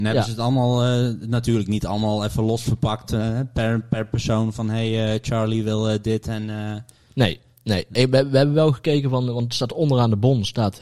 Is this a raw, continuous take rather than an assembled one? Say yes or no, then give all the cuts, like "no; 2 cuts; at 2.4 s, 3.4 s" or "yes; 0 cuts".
yes; 0 cuts